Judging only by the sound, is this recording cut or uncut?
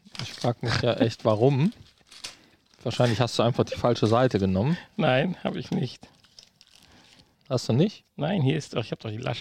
uncut